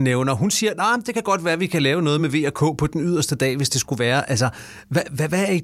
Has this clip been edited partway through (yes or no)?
no